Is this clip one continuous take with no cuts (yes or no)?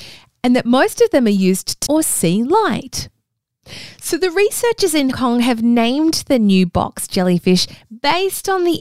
no